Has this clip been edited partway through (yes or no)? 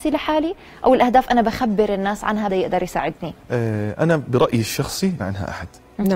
yes